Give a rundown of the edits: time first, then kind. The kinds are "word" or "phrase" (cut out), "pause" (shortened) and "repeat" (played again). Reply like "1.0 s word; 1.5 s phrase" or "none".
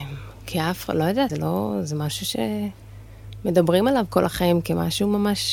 1.3 s phrase